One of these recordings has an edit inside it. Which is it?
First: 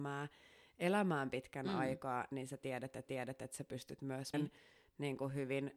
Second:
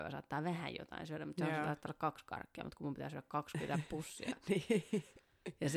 first; 2 cuts; at 3.0 s, 4.3 s

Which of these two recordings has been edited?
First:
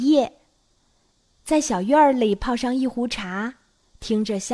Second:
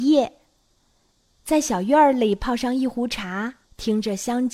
second; 1 cut; at 3.6 s

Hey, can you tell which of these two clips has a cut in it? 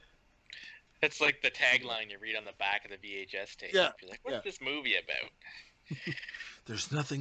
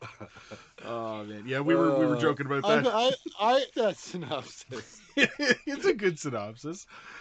second; 1 cut; at 3.7 s

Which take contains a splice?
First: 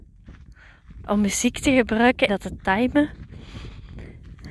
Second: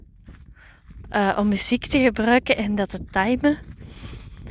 first; 2 cuts; at 1.1 s, 2.3 s

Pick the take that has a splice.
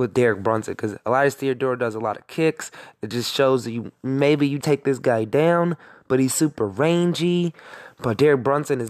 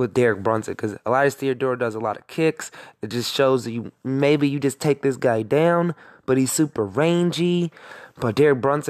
first; 1 cut; at 4.6 s

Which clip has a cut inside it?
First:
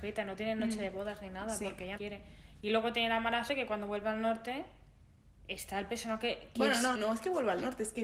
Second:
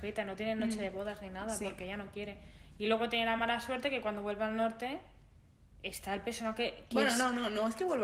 first; 3 cuts; at 2.0 s, 3.5 s, 6.9 s

